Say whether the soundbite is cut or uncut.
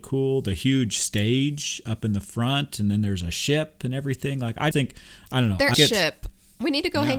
cut